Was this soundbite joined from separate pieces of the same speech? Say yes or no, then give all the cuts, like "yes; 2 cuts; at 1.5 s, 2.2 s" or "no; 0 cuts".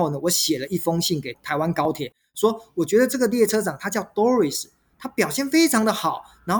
no; 0 cuts